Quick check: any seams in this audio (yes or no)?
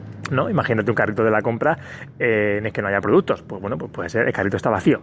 no